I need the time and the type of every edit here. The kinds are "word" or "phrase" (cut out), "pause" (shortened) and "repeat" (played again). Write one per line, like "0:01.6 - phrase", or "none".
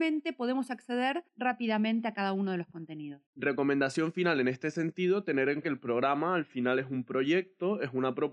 0:01.3 - pause
0:03.3 - pause
0:05.6 - word